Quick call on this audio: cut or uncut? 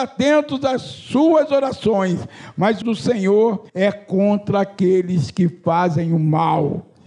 cut